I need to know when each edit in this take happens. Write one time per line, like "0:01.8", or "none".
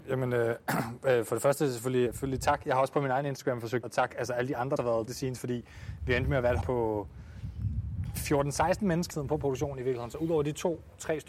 0:02.1
0:03.8
0:04.8
0:05.1
0:06.6
0:09.1